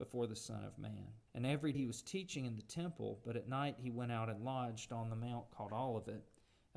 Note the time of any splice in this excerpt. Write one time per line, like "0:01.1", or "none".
0:01.3
0:01.7